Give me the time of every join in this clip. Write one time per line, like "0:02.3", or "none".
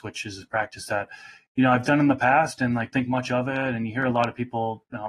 0:02.9